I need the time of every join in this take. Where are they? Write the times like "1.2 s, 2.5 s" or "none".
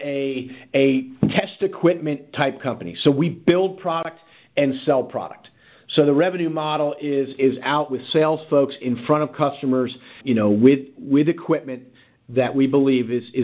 10.2 s